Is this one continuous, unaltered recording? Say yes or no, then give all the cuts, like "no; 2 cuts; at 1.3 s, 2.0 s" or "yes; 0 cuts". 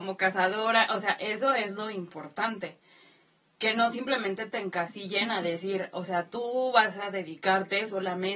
yes; 0 cuts